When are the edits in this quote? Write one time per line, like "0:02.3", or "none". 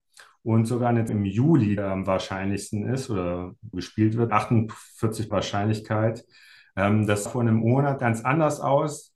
0:01.1
0:01.8
0:03.7
0:04.3
0:05.3
0:07.3
0:08.0